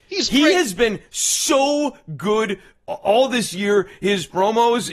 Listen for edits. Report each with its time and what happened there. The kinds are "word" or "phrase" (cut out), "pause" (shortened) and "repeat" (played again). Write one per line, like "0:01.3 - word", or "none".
none